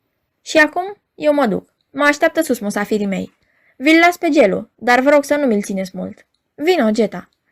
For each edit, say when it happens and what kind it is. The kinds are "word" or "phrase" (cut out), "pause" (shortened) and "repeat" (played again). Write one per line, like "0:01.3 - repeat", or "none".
none

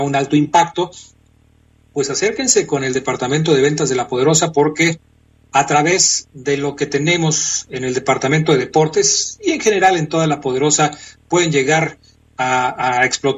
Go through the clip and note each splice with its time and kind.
none

